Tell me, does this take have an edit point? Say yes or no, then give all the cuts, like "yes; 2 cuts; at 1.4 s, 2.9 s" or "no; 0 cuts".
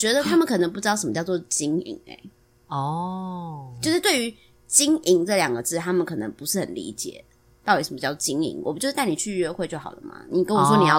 no; 0 cuts